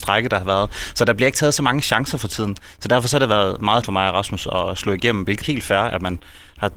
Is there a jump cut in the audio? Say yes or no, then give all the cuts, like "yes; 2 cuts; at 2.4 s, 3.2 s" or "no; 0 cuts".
yes; 2 cuts; at 3.8 s, 5.4 s